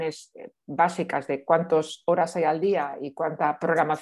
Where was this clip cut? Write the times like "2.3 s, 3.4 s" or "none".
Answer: none